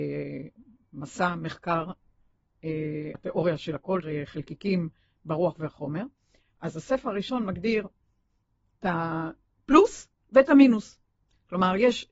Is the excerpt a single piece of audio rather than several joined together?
no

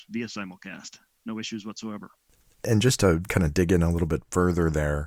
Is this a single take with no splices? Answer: yes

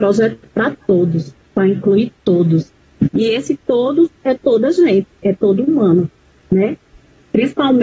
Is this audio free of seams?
yes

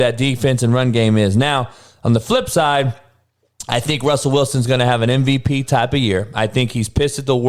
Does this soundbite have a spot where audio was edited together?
no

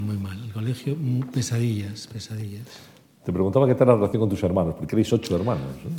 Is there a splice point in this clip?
no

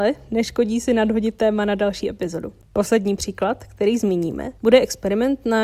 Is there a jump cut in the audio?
yes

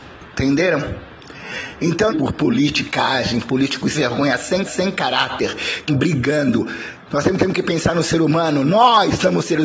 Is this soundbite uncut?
no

